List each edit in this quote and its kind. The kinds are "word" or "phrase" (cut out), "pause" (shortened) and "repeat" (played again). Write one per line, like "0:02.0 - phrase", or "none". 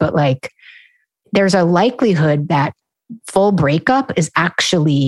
none